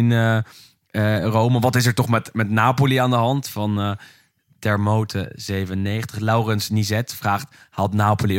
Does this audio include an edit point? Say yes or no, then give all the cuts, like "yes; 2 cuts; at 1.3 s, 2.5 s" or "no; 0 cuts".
no; 0 cuts